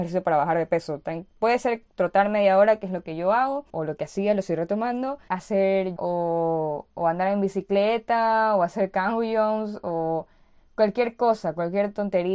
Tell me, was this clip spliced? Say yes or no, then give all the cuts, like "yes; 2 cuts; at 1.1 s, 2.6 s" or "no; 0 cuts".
yes; 4 cuts; at 1.9 s, 3.7 s, 5.3 s, 6.0 s